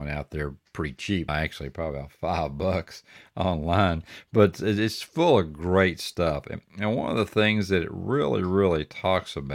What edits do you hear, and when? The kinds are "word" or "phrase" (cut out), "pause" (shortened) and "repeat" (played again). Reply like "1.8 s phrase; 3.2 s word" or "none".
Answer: 1.3 s word